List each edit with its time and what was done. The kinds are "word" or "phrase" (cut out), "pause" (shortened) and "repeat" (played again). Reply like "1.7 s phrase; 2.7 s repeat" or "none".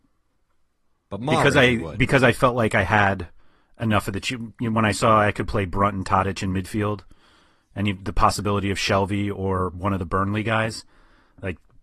none